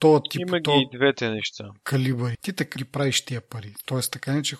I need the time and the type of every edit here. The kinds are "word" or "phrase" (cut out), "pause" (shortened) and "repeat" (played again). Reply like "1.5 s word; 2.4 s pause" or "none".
2.3 s word; 2.8 s word